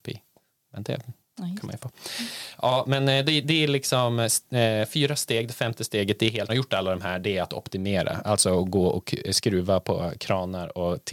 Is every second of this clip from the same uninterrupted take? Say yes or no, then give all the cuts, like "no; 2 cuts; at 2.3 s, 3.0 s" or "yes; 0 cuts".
no; 2 cuts; at 1.8 s, 6.5 s